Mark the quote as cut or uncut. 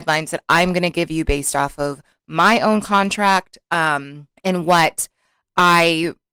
cut